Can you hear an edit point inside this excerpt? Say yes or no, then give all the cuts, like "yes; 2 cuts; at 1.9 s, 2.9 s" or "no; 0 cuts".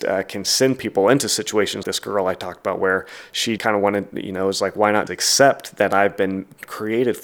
yes; 3 cuts; at 1.8 s, 3.6 s, 5.1 s